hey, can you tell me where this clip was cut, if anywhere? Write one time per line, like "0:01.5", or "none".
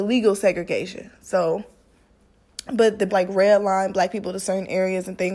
0:03.1

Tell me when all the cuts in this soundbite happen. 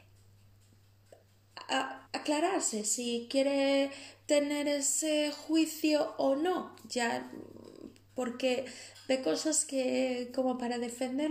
0:02.1

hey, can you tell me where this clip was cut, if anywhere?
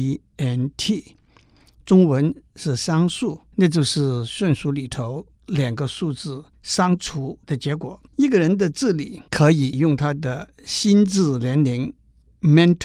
0:03.5
0:05.3
0:06.5
0:07.4
0:08.1
0:09.3

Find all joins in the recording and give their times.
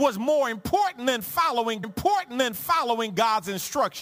0:01.8

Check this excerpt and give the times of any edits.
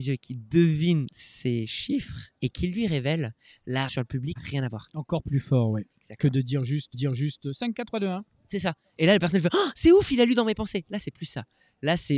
0:02.4
0:03.9
0:04.4
0:06.9

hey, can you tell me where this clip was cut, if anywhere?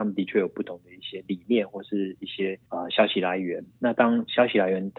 0:02.7

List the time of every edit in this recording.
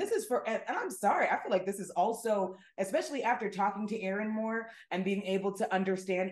none

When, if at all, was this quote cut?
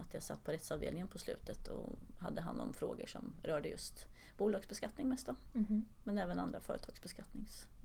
none

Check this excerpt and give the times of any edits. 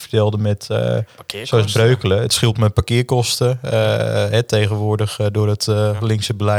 none

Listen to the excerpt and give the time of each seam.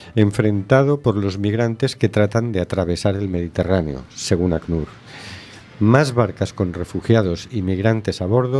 none

